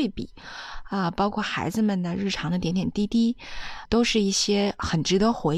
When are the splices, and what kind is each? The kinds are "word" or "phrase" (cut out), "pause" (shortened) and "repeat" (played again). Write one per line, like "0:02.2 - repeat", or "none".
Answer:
0:03.9 - word

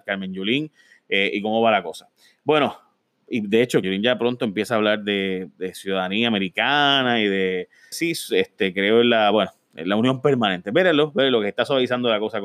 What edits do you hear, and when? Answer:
0:03.8 - word
0:07.9 - word

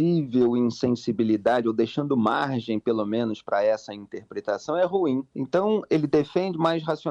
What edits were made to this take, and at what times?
0:05.3 - pause

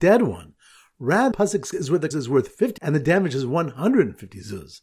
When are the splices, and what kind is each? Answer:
0:01.3 - word
0:01.7 - word
0:02.1 - word
0:02.8 - word

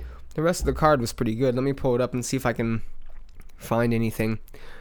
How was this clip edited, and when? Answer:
none

